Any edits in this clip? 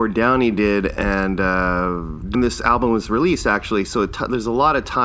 yes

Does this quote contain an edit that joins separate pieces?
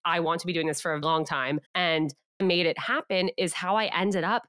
yes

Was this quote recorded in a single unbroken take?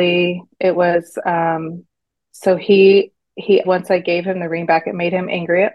no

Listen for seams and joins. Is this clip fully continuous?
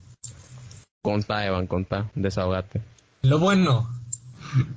yes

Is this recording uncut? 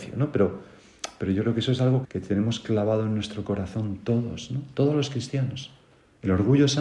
no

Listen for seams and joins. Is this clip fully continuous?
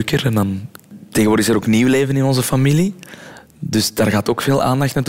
yes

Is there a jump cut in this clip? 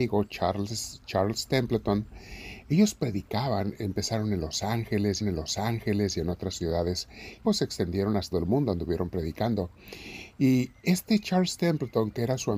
yes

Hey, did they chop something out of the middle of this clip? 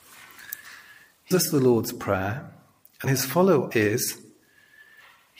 yes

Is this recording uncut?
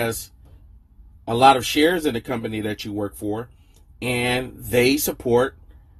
yes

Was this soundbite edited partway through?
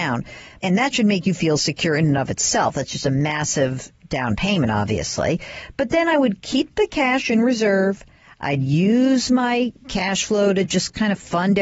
no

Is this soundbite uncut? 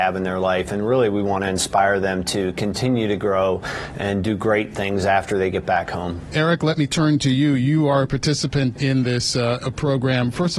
yes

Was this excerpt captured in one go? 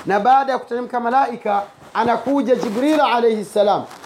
yes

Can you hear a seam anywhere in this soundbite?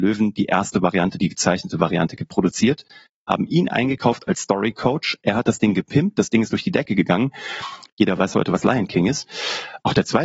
yes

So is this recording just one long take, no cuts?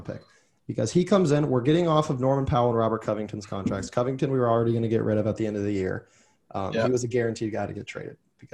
yes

